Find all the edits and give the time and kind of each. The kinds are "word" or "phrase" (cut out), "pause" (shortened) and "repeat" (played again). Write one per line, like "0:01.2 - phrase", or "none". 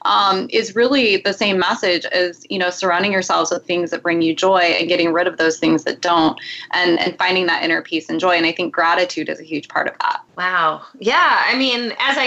0:10.3 - pause